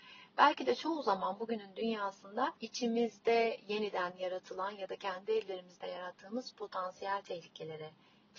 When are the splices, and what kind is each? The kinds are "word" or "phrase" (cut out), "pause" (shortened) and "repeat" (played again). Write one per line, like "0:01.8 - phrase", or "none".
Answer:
0:02.6 - pause

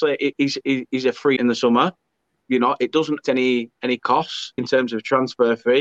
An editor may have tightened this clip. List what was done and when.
0:01.4 - word
0:02.4 - word
0:03.2 - word
0:04.6 - word

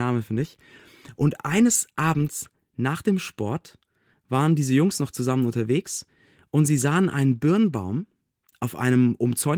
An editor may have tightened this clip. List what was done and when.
none

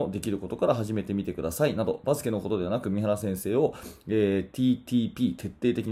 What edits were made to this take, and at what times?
none

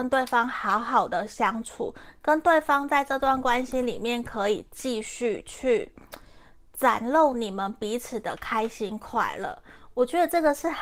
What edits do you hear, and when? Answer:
none

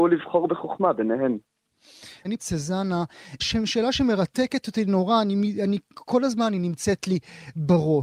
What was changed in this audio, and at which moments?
0:02.4 - phrase
0:03.4 - word

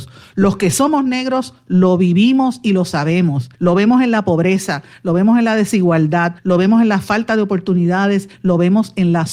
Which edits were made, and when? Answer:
0:03.5 - pause
0:06.4 - pause

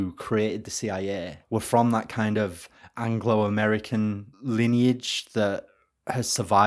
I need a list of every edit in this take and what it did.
0:01.4 - pause
0:04.3 - pause

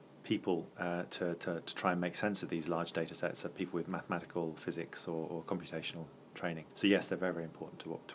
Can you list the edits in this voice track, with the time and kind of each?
0:06.7 - pause

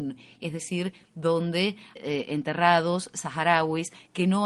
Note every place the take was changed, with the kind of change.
0:02.0 - word

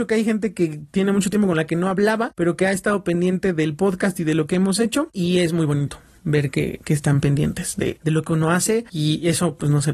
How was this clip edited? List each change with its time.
none

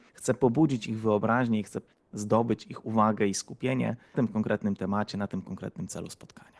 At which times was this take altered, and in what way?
0:04.1 - word

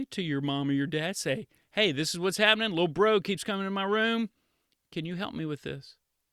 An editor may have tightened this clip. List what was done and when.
none

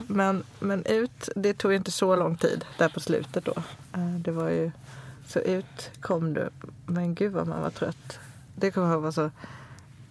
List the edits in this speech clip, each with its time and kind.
none

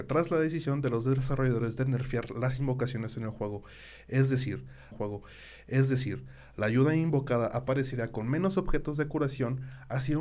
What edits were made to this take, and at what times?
0:04.9 - repeat

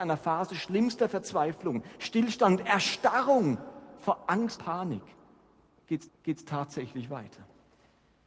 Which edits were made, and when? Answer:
0:04.6 - word
0:06.1 - repeat

